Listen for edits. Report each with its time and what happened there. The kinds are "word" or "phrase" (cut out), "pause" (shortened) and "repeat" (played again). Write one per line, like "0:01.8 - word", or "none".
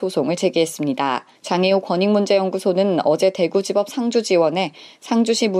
0:01.4 - pause